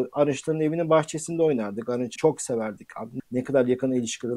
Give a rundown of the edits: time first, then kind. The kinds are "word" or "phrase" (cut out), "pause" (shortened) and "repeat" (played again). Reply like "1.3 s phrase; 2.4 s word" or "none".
2.2 s word; 3.2 s word